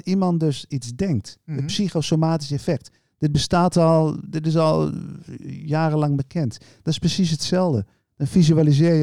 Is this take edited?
no; 0 cuts

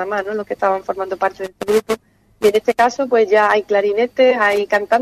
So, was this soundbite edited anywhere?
no; 0 cuts

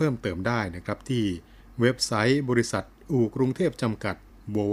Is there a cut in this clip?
no; 0 cuts

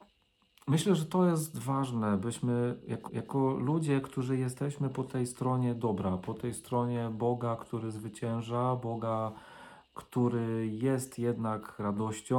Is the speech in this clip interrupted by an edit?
yes; 1 cut; at 3.1 s

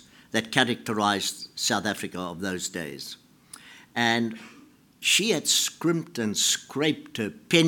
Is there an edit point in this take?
no; 0 cuts

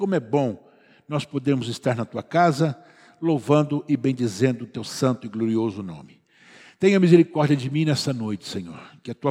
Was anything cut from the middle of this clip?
no; 0 cuts

